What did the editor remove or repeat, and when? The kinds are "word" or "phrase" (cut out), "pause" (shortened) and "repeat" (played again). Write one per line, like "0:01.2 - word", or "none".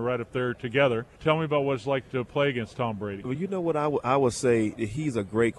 0:01.1 - pause

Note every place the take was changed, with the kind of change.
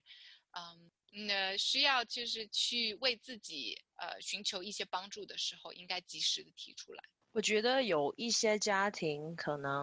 0:03.9 - word

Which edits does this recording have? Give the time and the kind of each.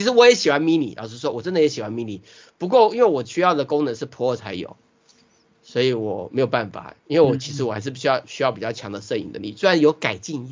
0:07.0 - pause

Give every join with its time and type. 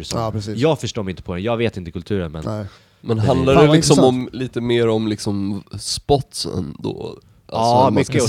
0:02.8 - pause

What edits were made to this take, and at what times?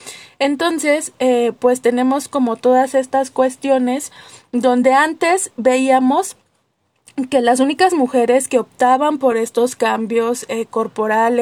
none

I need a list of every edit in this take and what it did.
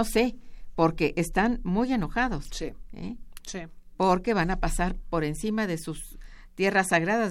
none

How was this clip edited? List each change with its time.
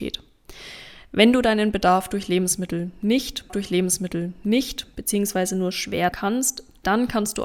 0:03.5 - repeat
0:06.1 - word

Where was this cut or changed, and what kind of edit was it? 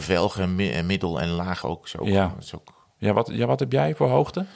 0:01.6 - word

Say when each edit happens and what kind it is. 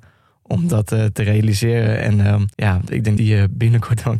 0:02.5 - pause
0:03.2 - word

